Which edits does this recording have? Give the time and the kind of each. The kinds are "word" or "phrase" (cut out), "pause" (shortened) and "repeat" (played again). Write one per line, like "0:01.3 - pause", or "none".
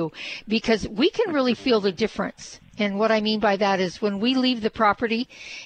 none